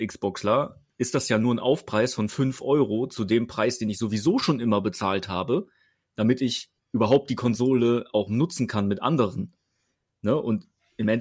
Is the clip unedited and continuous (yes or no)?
yes